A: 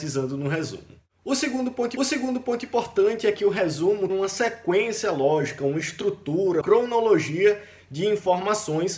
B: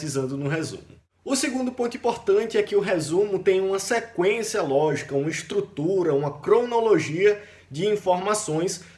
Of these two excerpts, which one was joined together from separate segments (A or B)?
A